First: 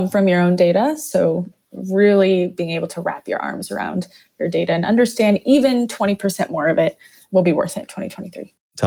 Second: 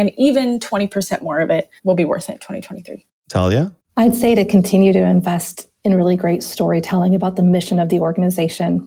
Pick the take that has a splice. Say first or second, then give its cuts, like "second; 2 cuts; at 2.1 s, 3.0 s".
second; 1 cut; at 1.8 s